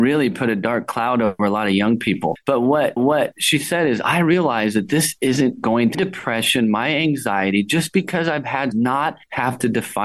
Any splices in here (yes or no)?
yes